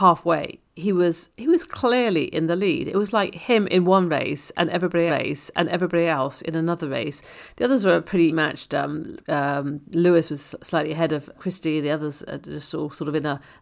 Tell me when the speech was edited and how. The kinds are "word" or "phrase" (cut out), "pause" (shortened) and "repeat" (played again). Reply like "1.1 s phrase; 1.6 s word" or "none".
5.1 s repeat; 8.3 s word; 9.2 s pause; 11.3 s word